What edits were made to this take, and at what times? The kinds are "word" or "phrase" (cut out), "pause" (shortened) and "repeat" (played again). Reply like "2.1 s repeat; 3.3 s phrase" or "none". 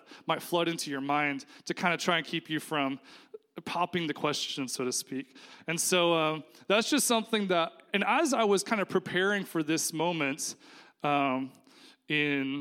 none